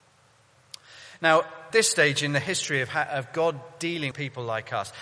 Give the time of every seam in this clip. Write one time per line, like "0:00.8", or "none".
0:01.7
0:04.1